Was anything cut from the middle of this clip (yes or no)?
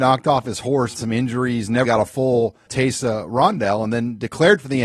yes